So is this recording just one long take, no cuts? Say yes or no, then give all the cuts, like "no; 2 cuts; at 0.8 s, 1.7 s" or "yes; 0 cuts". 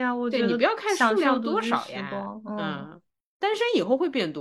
yes; 0 cuts